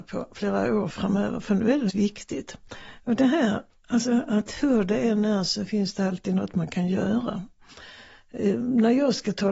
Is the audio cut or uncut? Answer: cut